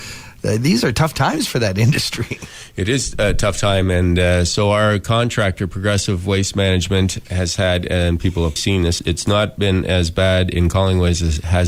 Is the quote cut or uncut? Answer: cut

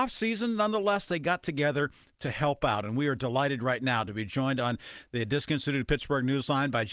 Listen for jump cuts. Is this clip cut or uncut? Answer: uncut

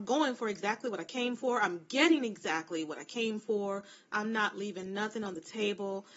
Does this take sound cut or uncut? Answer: uncut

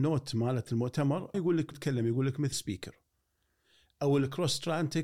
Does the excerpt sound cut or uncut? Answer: cut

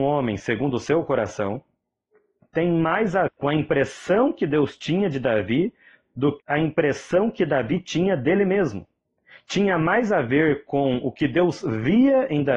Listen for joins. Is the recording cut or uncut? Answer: cut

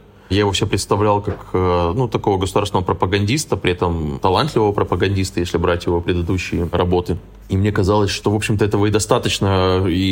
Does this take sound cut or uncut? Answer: uncut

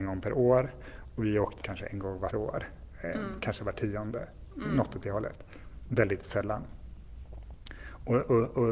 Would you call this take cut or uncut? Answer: cut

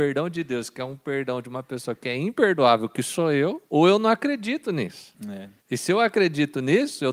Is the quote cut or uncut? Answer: cut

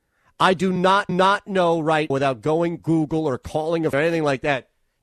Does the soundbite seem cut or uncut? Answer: cut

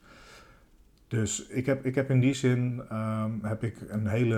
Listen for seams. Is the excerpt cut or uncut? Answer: uncut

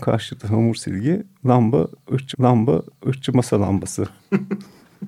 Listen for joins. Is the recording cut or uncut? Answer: cut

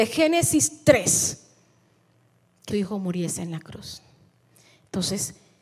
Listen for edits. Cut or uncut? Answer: cut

